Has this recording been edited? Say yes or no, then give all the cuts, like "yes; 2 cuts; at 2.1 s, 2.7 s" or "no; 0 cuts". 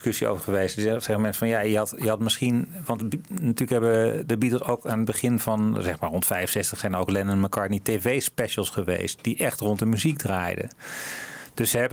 no; 0 cuts